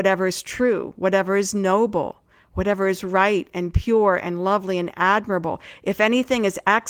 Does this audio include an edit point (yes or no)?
no